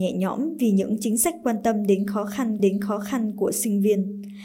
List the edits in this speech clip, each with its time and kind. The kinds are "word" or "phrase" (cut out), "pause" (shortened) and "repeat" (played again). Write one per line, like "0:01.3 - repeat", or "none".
0:02.6 - repeat